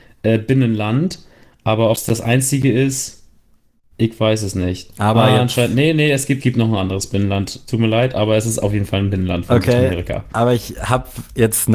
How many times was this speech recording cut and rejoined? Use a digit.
1